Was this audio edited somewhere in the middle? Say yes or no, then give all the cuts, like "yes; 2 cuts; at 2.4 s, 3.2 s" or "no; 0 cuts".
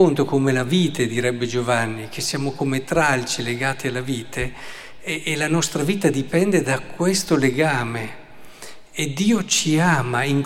no; 0 cuts